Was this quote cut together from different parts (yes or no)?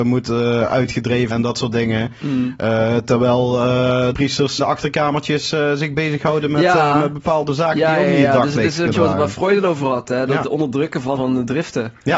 yes